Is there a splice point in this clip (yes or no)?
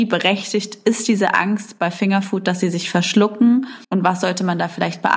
yes